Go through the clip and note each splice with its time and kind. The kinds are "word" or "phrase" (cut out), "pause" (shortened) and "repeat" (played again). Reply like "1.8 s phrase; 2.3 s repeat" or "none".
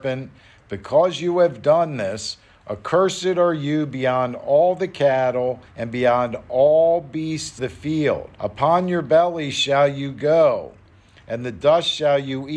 5.7 s pause; 7.6 s word; 8.3 s pause